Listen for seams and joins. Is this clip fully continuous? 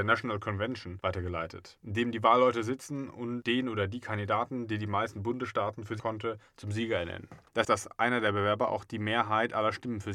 no; 2 cuts; at 6.0 s, 7.6 s

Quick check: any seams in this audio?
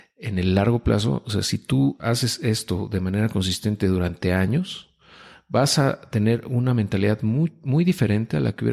no; 0 cuts

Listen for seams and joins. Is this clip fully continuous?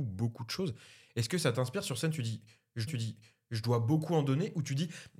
no; 1 cut; at 2.9 s

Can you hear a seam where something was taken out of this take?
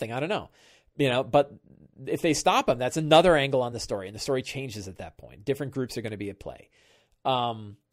no; 0 cuts

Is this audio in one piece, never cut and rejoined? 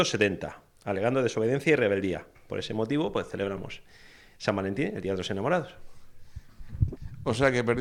yes; 0 cuts

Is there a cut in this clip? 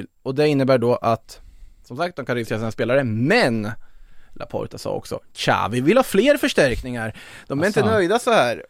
no; 0 cuts

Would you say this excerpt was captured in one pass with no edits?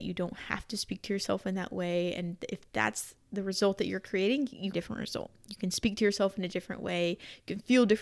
no; 1 cut; at 4.7 s

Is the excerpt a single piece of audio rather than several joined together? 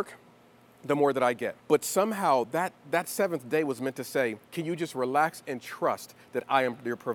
no; 2 cuts; at 1.6 s, 4.4 s

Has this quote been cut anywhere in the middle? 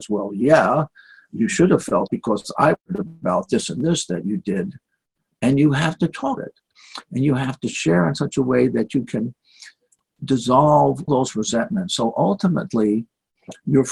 yes; 3 cuts; at 2.1 s, 6.4 s, 11.1 s

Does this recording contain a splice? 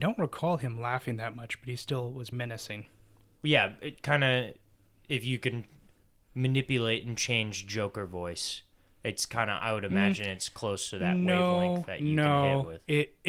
yes; 1 cut; at 2.3 s

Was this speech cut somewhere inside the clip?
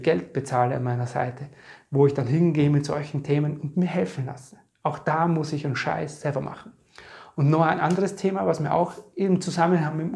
no; 0 cuts

